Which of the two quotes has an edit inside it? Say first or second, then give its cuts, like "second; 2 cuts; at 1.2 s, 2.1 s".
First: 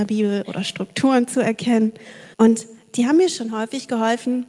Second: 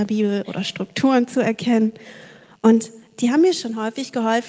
first; 1 cut; at 2.3 s